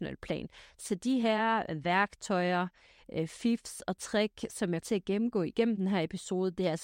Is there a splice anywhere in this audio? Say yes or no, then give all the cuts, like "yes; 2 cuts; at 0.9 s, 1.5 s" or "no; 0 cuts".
yes; 1 cut; at 4.8 s